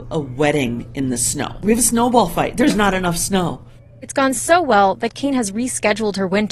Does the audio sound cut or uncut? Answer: uncut